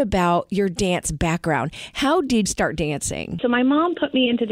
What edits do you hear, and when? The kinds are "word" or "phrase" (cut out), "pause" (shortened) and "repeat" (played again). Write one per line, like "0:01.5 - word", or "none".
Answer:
0:02.5 - word